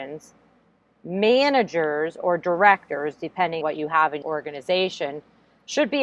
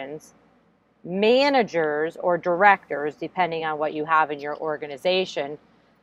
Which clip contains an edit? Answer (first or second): first